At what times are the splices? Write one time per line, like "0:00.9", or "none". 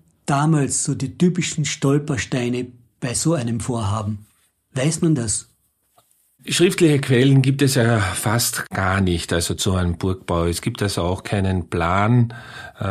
none